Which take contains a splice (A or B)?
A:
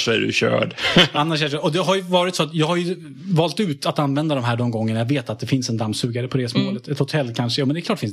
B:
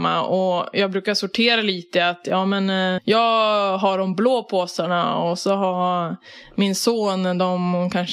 B